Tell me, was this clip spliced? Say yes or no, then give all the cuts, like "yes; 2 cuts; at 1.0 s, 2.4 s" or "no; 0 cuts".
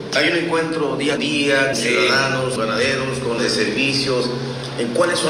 yes; 4 cuts; at 1.2 s, 1.7 s, 2.6 s, 3.4 s